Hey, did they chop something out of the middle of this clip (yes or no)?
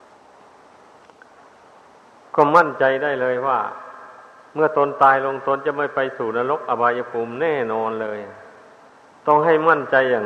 no